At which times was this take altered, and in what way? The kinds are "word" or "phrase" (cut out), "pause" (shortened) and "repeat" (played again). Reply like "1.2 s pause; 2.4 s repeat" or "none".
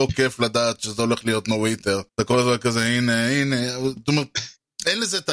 2.1 s pause